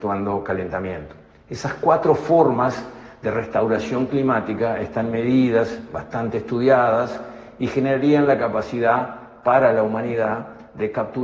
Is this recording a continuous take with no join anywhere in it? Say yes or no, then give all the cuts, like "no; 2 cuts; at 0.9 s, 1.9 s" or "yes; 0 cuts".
yes; 0 cuts